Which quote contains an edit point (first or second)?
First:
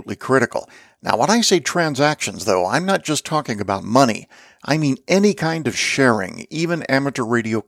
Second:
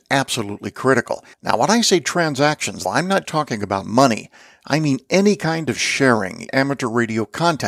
second